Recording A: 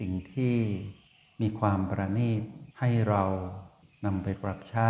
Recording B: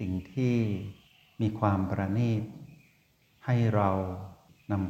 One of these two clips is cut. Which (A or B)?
A